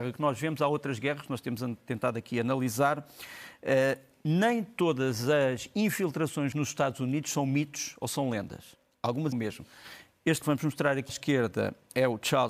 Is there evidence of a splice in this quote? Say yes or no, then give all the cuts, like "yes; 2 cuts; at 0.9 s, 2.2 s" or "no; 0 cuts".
yes; 4 cuts; at 6.5 s, 9.3 s, 10.4 s, 11.1 s